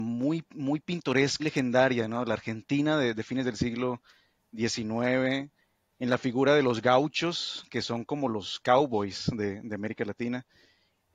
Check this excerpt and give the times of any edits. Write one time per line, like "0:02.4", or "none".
0:01.4